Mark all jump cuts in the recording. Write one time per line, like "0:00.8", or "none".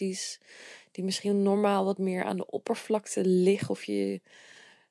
none